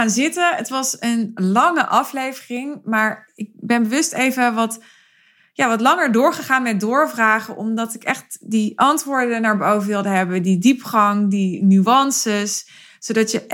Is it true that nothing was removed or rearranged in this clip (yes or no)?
yes